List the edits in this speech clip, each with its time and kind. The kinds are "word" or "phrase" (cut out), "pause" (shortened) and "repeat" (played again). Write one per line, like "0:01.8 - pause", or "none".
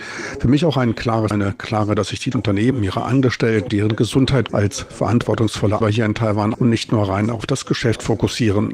0:01.3 - word
0:02.0 - word
0:02.3 - word
0:02.7 - word
0:03.7 - word
0:04.5 - word
0:05.8 - word
0:06.5 - word